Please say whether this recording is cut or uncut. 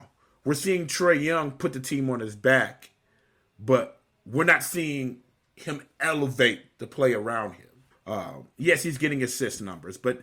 cut